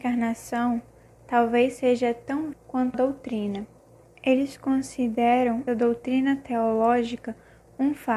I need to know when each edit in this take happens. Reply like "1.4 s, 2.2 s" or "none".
2.5 s, 2.9 s, 4.0 s, 5.7 s

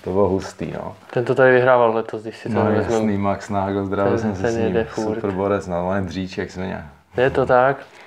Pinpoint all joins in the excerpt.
none

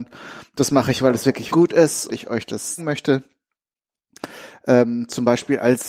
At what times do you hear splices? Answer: 1.5 s, 2.1 s, 2.8 s

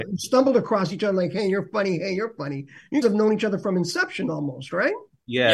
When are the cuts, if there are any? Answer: 3.0 s

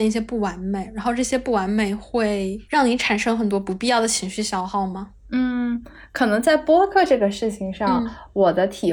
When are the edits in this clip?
5.2 s

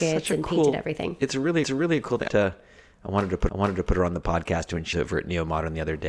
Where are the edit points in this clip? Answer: 1.6 s, 2.3 s, 3.5 s, 4.9 s

